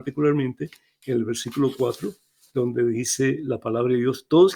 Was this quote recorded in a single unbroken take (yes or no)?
yes